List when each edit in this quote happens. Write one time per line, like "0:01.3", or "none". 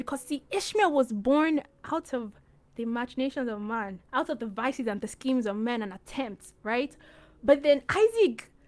0:04.1